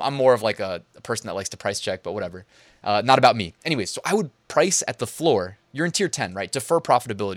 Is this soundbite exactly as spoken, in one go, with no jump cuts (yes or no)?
yes